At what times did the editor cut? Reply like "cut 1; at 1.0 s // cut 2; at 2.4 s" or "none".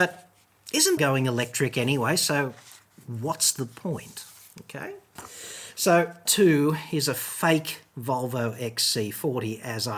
cut 1; at 1.0 s // cut 2; at 6.3 s

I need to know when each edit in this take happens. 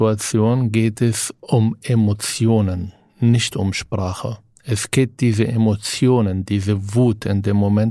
none

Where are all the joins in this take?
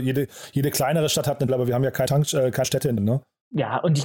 cut 1; at 1.5 s // cut 2; at 2.1 s // cut 3; at 2.6 s // cut 4; at 3.0 s

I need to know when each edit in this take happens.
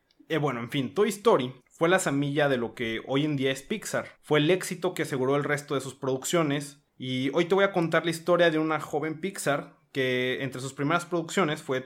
cut 1; at 1.6 s // cut 2; at 4.2 s // cut 3; at 6.9 s

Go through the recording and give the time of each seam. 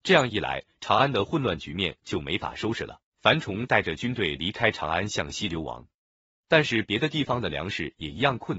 cut 1; at 3.1 s

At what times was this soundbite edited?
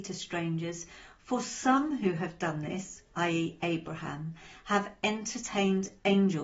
cut 1; at 3.0 s

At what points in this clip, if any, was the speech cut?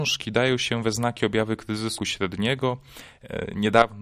cut 1; at 2.0 s

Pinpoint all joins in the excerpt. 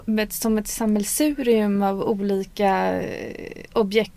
none

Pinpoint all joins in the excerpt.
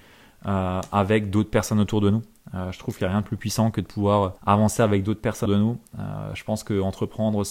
cut 1; at 4.4 s // cut 2; at 5.5 s

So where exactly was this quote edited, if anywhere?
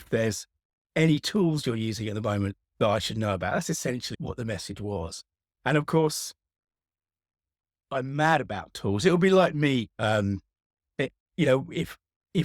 cut 1; at 2.6 s // cut 2; at 4.1 s // cut 3; at 9.9 s

